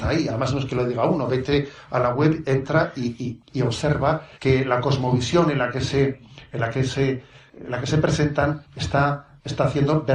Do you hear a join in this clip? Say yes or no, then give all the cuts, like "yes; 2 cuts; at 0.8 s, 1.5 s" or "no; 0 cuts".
yes; 1 cut; at 4.3 s